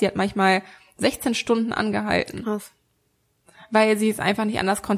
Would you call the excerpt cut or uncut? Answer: uncut